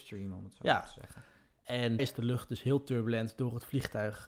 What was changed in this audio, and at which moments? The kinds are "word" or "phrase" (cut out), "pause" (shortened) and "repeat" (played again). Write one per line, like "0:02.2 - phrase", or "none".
0:02.0 - word